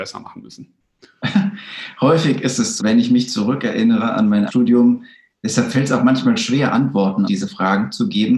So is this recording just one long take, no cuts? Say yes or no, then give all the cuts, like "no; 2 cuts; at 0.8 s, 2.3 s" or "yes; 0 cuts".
no; 3 cuts; at 2.8 s, 4.5 s, 7.3 s